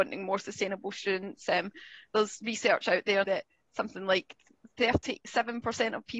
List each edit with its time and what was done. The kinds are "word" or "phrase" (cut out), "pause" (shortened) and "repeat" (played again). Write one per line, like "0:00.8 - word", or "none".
0:03.2 - word